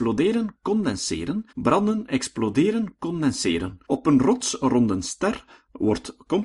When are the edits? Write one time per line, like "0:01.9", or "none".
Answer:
0:01.5
0:03.8